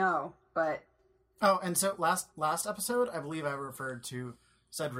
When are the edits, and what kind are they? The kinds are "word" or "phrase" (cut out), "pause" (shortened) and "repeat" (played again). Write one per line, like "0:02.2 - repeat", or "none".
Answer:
0:02.3 - pause